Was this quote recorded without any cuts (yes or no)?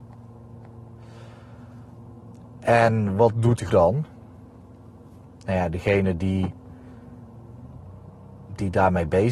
no